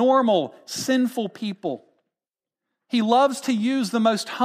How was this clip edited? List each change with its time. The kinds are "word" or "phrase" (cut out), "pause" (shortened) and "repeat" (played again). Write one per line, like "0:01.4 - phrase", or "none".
none